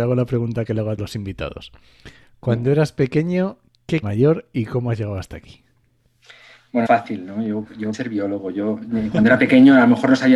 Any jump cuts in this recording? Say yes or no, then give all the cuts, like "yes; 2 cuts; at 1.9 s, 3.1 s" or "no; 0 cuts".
yes; 4 cuts; at 1.0 s, 4.0 s, 6.9 s, 7.9 s